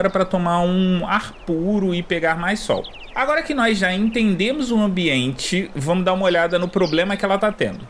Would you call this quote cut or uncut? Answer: uncut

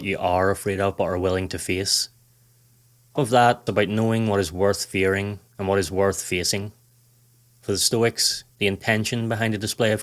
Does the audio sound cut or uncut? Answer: cut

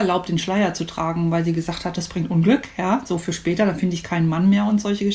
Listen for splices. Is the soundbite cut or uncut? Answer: uncut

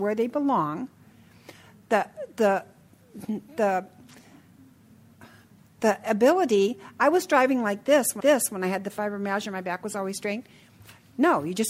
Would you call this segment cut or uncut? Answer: cut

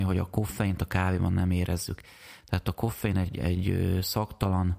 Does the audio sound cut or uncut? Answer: uncut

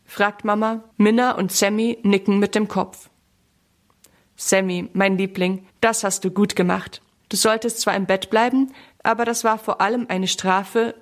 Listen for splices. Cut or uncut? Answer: cut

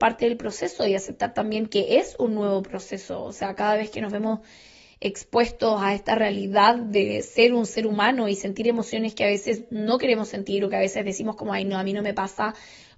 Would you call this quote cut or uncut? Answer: uncut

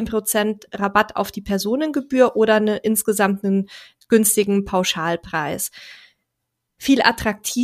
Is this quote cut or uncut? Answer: uncut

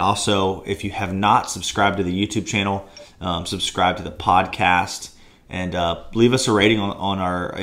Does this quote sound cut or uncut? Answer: uncut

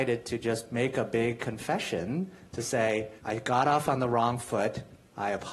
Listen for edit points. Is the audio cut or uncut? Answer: cut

